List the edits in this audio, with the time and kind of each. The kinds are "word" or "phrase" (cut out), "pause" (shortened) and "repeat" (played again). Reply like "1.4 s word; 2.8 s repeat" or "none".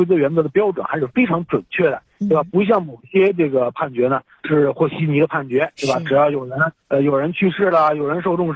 6.8 s pause